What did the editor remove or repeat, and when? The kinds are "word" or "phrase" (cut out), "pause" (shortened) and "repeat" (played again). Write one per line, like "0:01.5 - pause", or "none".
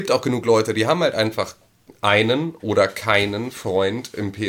none

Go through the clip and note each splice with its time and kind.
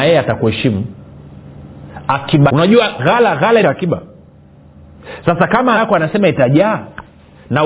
0:02.5 - word
0:03.0 - word
0:03.6 - word
0:05.8 - word

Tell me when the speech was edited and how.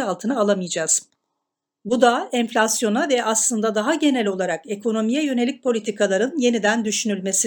none

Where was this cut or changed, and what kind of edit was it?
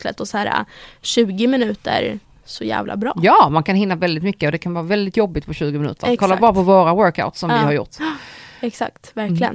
0:02.2 - pause

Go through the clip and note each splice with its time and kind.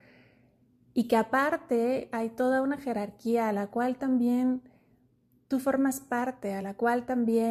none

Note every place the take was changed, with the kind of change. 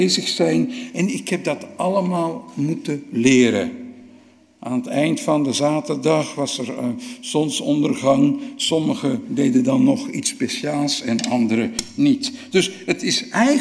none

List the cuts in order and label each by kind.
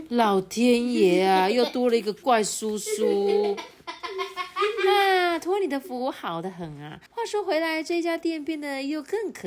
0:07.1 - pause

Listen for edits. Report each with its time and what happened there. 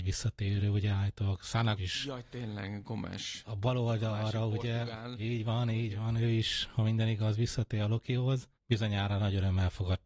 0:01.8 - word
0:08.5 - pause

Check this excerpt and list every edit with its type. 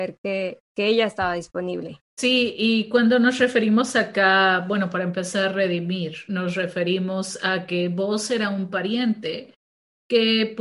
0:02.1 - pause

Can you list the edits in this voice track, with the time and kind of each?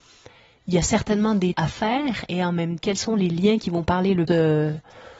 0:01.5 - word
0:02.8 - word
0:04.3 - word

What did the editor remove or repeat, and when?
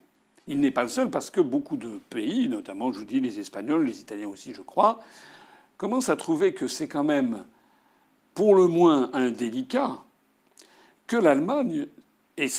none

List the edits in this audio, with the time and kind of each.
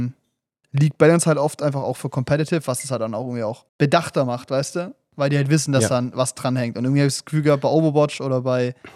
0:03.7 - pause

